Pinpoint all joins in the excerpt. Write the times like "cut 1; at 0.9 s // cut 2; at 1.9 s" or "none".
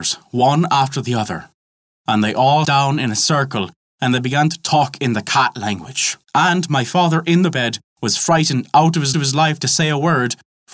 cut 1; at 2.6 s // cut 2; at 6.2 s // cut 3; at 9.1 s